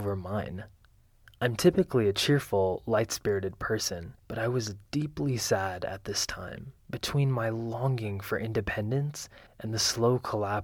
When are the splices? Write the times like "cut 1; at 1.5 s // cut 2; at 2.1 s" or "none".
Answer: cut 1; at 4.2 s // cut 2; at 6.8 s // cut 3; at 9.5 s

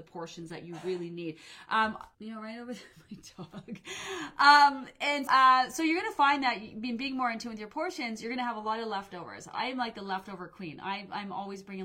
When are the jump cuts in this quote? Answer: cut 1; at 2.1 s // cut 2; at 5.3 s

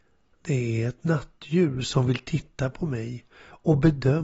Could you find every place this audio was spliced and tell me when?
cut 1; at 3.3 s

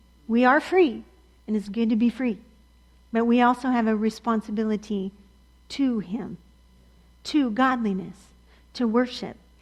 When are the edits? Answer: none

